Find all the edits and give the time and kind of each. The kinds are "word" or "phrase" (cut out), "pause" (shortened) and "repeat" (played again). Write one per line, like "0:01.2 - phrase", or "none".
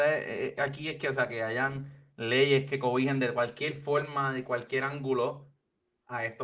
none